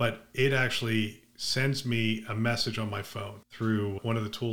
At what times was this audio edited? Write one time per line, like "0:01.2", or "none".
0:03.4